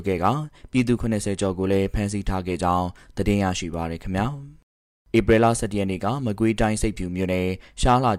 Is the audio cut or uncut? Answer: uncut